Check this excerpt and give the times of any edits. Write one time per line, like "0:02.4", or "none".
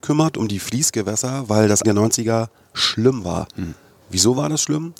0:01.8